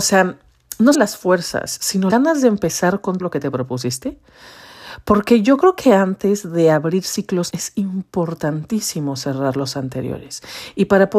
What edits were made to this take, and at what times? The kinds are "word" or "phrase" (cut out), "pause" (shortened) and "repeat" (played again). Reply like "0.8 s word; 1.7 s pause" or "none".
0.9 s word; 2.1 s word; 3.2 s word; 7.5 s word